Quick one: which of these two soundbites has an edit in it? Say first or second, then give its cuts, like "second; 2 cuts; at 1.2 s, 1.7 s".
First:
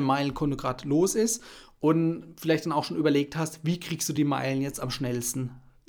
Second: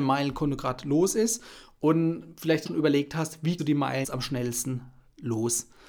second; 3 cuts; at 2.7 s, 3.6 s, 4.0 s